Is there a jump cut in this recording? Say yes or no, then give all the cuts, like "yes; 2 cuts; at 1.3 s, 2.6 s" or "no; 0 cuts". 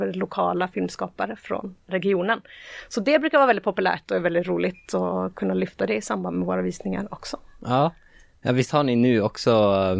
no; 0 cuts